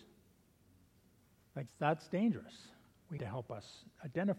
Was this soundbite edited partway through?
yes; 2 cuts; at 1.7 s, 3.2 s

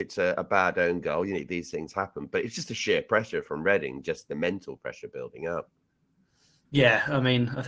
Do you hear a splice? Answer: no; 0 cuts

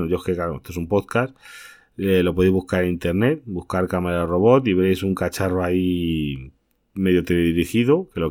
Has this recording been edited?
no; 0 cuts

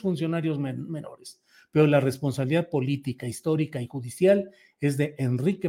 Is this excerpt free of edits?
yes; 0 cuts

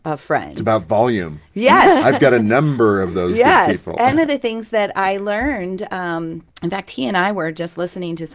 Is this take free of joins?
no; 2 cuts; at 4.1 s, 6.5 s

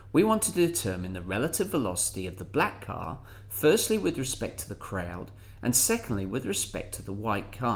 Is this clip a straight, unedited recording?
yes; 0 cuts

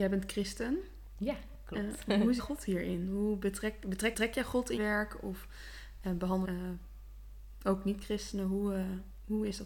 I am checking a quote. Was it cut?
yes; 4 cuts; at 2.4 s, 4.1 s, 4.8 s, 6.4 s

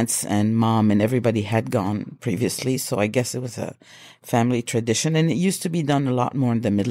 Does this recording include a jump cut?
no; 0 cuts

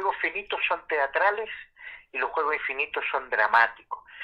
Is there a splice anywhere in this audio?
no; 0 cuts

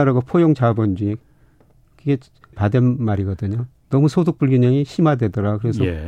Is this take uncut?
no; 1 cut; at 2.5 s

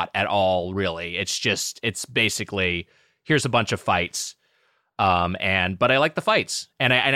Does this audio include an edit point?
no; 0 cuts

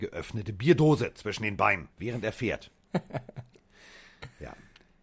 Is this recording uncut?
no; 1 cut; at 1.9 s

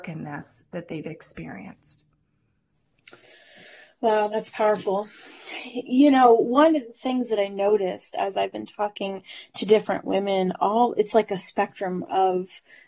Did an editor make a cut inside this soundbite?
no; 0 cuts

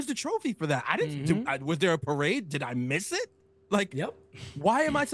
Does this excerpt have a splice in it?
no; 0 cuts

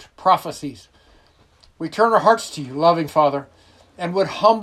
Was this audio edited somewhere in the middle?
no; 0 cuts

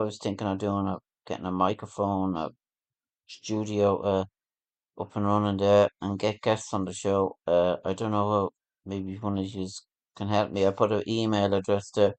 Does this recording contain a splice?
no; 0 cuts

